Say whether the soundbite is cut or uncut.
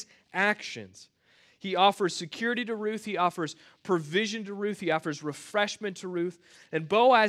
uncut